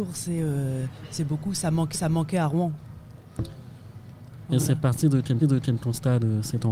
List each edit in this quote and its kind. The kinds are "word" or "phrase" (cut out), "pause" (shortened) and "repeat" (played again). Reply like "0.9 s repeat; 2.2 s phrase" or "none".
1.9 s repeat; 5.4 s repeat